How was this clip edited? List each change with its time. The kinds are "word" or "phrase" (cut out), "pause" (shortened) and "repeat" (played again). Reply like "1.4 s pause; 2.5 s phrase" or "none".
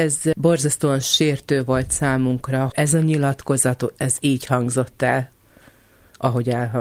2.7 s word